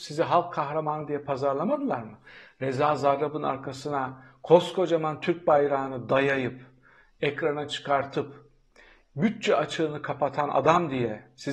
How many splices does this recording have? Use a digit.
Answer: 0